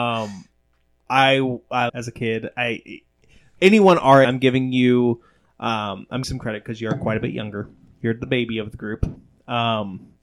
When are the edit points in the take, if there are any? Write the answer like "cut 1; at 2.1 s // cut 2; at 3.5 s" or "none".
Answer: cut 1; at 1.1 s // cut 2; at 1.9 s // cut 3; at 4.2 s // cut 4; at 6.2 s